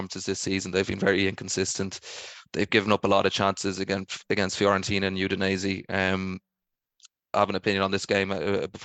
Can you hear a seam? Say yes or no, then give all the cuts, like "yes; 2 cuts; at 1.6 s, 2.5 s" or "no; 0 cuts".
yes; 1 cut; at 7.3 s